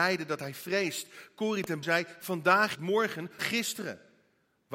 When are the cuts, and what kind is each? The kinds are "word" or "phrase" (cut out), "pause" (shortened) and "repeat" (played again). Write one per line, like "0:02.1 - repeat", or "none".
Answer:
0:01.8 - word
0:02.7 - phrase
0:03.4 - word

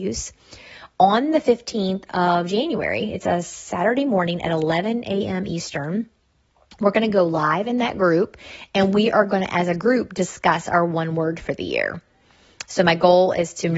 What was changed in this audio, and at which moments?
none

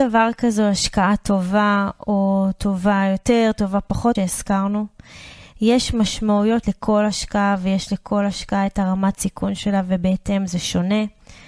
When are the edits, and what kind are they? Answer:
0:04.1 - word
0:06.6 - word

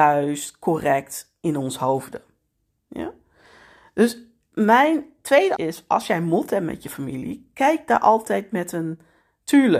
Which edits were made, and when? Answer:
0:05.6 - word

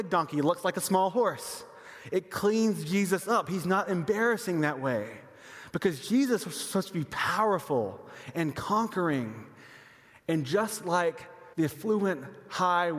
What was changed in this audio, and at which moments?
0:11.5 - pause

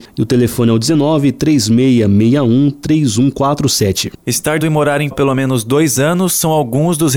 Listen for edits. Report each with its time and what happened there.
0:04.6 - word
0:05.1 - word

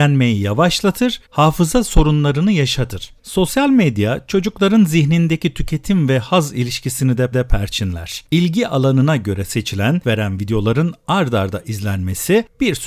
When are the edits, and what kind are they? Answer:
0:01.3 - pause
0:03.2 - pause
0:07.3 - repeat
0:10.0 - word

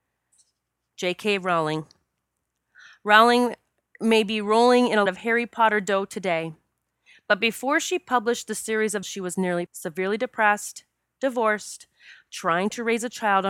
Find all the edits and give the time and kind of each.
0:05.1 - word
0:09.0 - word
0:09.7 - word

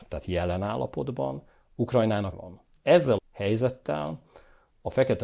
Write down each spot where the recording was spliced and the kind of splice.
0:02.3 - word
0:03.2 - word

